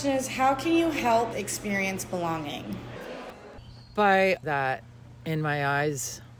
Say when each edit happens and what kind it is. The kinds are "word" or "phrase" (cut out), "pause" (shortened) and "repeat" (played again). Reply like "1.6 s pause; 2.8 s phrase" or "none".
1.3 s word; 4.4 s word